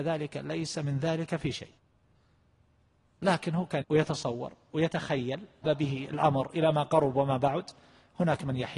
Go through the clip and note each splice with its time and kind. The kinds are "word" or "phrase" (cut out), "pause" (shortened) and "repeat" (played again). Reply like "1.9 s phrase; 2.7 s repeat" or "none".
3.8 s word; 5.6 s word